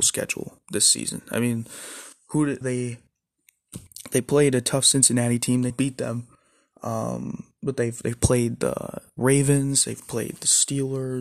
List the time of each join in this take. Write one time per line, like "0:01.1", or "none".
0:02.6
0:05.7
0:07.6